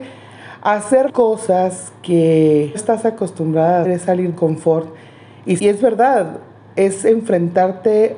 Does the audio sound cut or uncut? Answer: cut